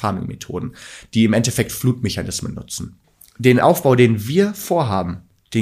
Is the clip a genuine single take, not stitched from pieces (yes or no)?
yes